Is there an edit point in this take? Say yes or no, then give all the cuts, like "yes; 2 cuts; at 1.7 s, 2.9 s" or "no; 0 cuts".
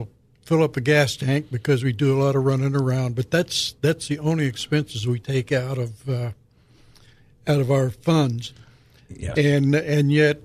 no; 0 cuts